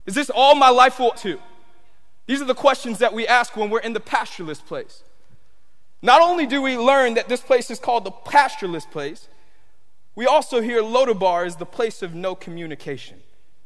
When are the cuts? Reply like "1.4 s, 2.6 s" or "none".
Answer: 1.2 s